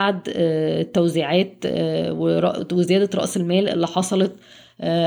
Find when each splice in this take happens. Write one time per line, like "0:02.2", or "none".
none